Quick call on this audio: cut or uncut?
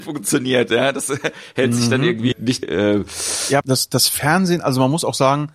cut